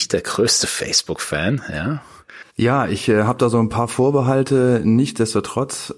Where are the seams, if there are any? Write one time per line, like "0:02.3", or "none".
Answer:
0:02.5